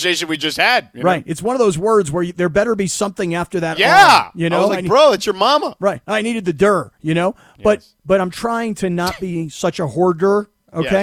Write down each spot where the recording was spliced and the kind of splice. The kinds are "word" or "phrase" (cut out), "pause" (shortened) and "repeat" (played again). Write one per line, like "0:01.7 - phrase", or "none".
none

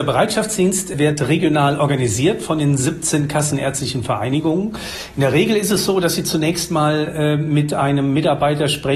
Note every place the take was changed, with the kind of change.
none

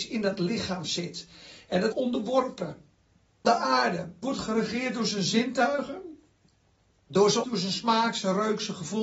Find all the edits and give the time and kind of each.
0:01.9 - word
0:03.4 - word
0:04.2 - word
0:07.4 - word

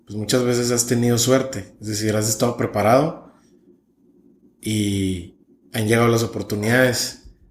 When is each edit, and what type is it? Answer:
none

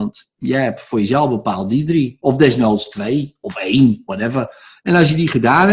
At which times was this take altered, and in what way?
none

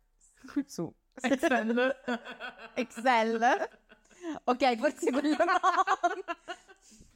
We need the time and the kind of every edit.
none

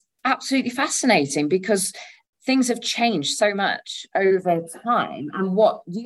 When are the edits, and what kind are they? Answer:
0:02.2 - pause

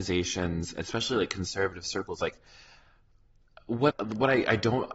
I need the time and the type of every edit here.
0:03.9 - word

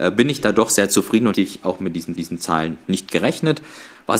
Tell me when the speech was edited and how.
0:01.3 - word
0:02.2 - repeat

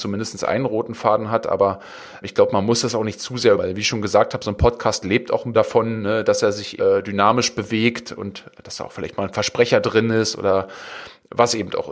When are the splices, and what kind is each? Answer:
0:02.2 - word
0:03.6 - word
0:05.5 - word
0:06.8 - word

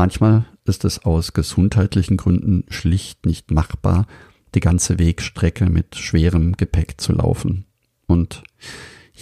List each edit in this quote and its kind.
none

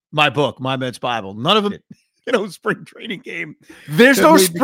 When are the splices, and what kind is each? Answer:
0:01.7 - word
0:02.3 - word

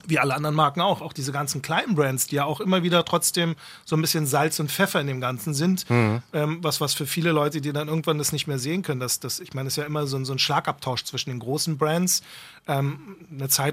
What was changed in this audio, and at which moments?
none

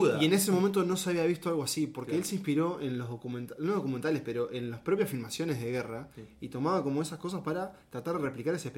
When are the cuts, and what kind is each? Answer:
none

